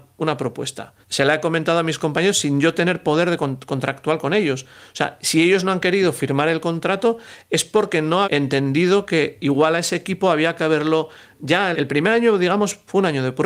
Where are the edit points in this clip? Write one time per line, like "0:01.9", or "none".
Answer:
0:01.0
0:08.2
0:11.7